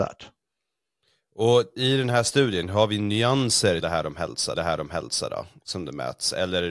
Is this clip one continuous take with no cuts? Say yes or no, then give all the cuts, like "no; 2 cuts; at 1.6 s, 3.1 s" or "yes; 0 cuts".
no; 2 cuts; at 3.8 s, 4.6 s